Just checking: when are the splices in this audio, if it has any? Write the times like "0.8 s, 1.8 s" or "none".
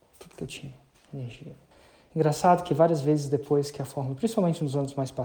1.7 s